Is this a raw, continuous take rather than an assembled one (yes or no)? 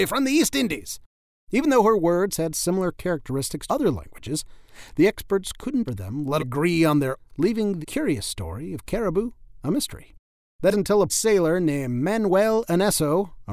no